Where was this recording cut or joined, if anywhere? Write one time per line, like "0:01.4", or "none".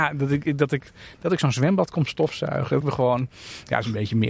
0:02.8